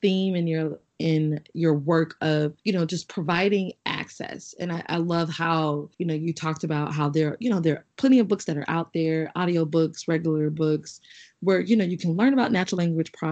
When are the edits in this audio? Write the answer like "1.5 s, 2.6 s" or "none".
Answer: 2.6 s, 5.9 s